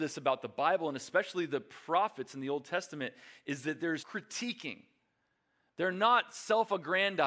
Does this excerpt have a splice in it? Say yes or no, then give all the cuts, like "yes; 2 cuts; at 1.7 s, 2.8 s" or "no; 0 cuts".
yes; 1 cut; at 4.0 s